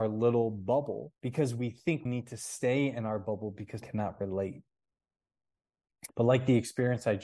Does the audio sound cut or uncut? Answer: cut